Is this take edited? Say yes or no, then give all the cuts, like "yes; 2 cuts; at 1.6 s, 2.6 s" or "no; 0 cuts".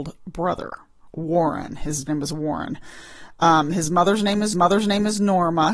yes; 2 cuts; at 2.1 s, 4.5 s